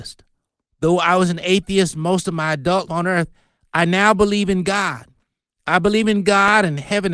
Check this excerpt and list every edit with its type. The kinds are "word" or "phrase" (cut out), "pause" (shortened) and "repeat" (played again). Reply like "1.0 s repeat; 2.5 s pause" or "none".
2.9 s word